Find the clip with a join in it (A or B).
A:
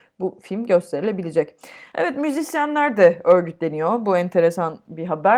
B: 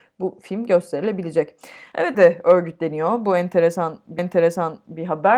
B